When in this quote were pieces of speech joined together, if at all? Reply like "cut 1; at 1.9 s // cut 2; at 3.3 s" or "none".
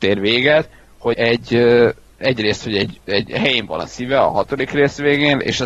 cut 1; at 1.1 s